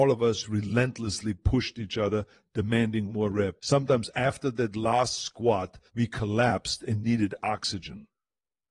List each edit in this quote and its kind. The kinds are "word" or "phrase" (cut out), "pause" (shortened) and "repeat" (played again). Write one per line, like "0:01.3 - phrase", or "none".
0:03.1 - word
0:03.6 - pause
0:05.9 - pause